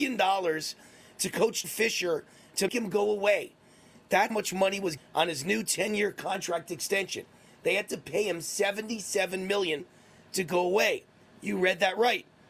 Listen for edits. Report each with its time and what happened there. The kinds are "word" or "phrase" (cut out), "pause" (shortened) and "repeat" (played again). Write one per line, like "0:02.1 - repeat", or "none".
0:01.6 - word
0:02.7 - word
0:04.3 - word
0:05.0 - word

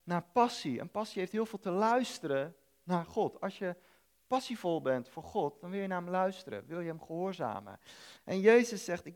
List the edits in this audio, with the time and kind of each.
none

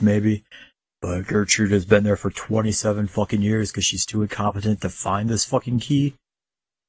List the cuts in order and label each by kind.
none

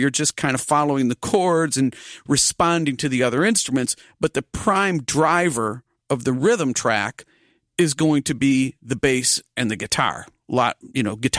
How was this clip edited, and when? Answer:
none

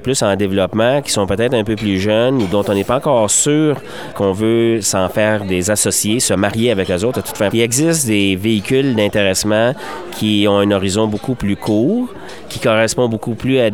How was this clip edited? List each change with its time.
0:04.1 - word
0:07.5 - word

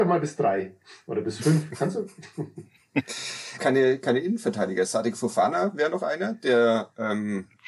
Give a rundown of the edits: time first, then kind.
0:03.6 - phrase

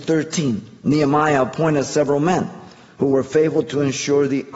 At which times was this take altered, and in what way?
none

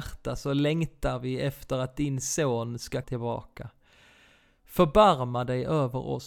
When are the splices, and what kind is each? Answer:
0:03.0 - word

